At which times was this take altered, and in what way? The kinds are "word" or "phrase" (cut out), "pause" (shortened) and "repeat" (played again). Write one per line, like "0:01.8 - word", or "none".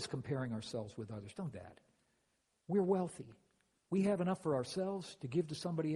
0:01.5 - word